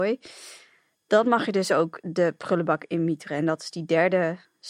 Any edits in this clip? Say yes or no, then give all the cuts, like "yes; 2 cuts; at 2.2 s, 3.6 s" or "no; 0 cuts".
no; 0 cuts